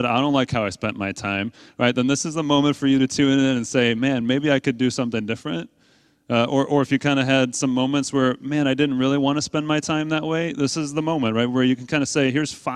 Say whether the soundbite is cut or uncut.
uncut